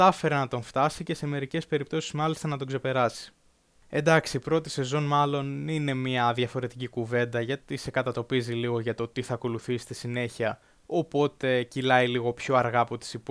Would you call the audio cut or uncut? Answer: uncut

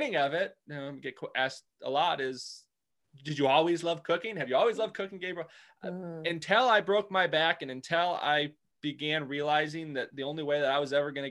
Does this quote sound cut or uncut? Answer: uncut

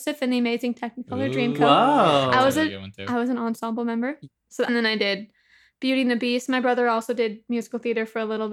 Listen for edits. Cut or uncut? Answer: cut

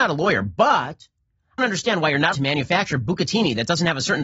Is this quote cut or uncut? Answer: cut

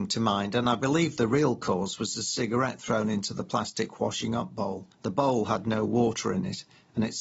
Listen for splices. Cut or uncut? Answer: cut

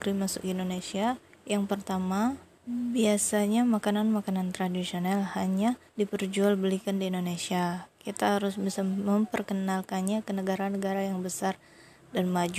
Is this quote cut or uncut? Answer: cut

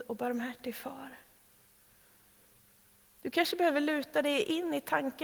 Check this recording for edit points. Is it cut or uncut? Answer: uncut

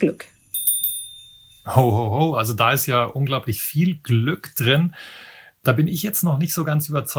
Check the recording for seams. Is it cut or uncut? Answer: uncut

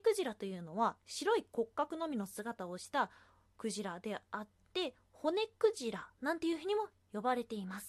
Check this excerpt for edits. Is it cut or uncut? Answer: uncut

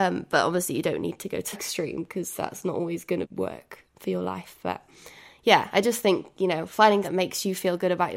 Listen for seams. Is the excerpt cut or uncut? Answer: cut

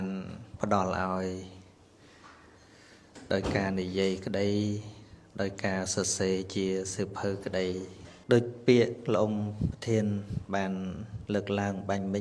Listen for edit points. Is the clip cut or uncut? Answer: cut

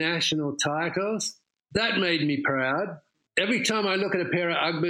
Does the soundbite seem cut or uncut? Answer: uncut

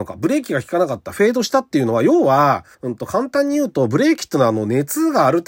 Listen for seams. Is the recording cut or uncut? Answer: cut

